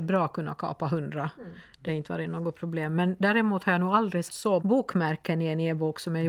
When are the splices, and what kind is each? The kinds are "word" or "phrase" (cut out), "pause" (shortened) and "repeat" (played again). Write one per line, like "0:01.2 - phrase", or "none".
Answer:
0:01.9 - word
0:04.3 - word
0:04.6 - word